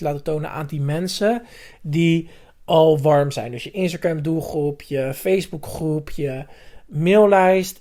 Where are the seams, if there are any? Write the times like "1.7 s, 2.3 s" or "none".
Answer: none